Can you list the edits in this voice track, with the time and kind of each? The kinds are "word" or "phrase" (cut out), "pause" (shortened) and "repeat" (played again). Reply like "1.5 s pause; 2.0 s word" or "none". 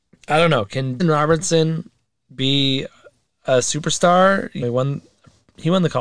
1.0 s word; 4.6 s word